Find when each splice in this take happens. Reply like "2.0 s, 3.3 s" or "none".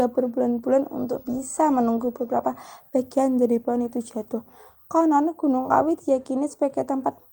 none